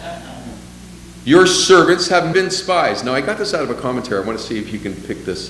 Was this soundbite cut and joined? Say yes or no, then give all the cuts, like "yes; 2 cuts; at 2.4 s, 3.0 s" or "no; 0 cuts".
yes; 1 cut; at 2.3 s